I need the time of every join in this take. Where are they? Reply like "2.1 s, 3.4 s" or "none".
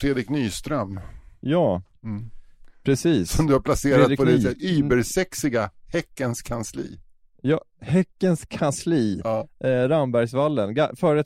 none